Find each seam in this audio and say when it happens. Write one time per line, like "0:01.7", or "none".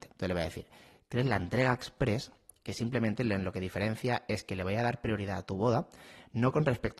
none